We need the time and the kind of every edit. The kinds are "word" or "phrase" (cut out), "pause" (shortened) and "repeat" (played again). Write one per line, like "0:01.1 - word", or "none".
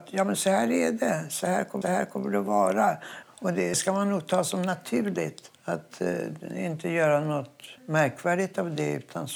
0:01.8 - repeat
0:03.7 - phrase
0:05.5 - pause
0:07.8 - pause